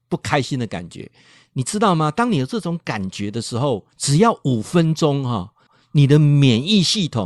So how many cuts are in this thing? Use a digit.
2